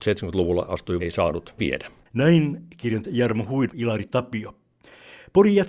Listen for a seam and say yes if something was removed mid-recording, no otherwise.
yes